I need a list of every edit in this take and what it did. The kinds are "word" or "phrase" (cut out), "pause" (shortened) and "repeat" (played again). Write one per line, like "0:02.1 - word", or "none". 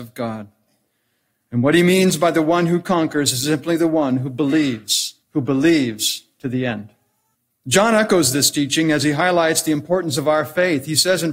0:05.2 - pause
0:06.3 - pause
0:07.3 - pause